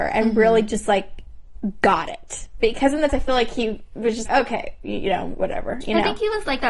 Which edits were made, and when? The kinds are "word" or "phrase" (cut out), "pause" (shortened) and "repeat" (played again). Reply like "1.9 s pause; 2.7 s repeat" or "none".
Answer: 3.1 s word; 4.3 s word